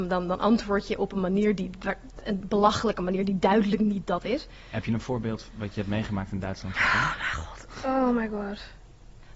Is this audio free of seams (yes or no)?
yes